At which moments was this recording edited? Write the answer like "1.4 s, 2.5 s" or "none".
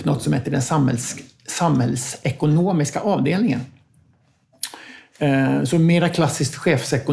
none